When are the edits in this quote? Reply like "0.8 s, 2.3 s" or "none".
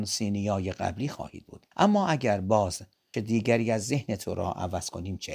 1.7 s, 3.1 s